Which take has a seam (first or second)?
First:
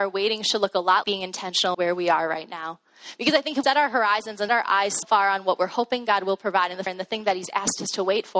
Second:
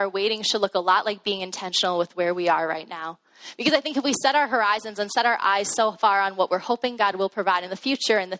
first